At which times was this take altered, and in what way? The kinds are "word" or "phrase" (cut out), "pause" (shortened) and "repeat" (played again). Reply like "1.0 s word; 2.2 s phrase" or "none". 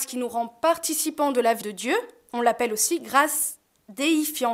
1.6 s word